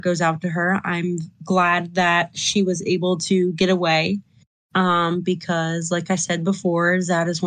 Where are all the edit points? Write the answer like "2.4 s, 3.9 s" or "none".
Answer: none